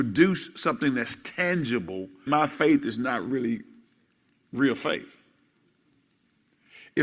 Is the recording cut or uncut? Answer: cut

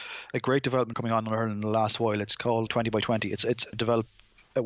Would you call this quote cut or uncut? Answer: cut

